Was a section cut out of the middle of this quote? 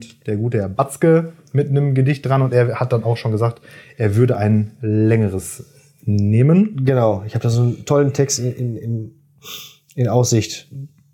no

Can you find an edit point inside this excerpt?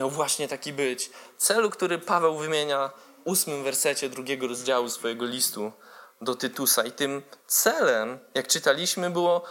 yes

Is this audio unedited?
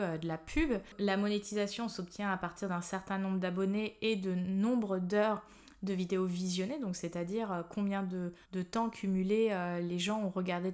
no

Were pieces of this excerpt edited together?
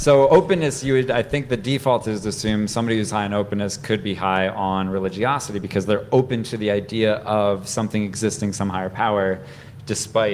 no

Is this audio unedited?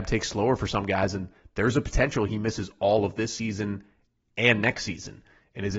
yes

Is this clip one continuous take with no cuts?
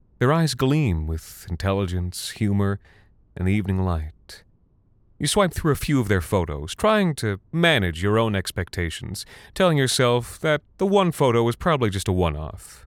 yes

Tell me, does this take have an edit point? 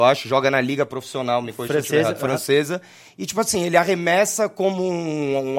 no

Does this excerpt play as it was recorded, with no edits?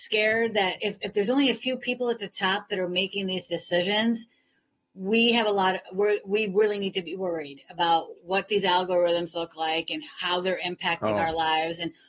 yes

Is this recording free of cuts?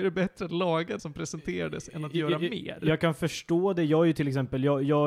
no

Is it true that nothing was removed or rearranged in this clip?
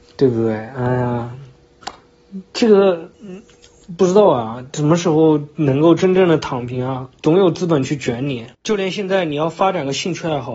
no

